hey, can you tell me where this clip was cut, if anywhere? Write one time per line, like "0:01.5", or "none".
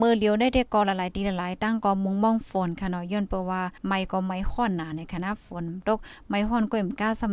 0:03.8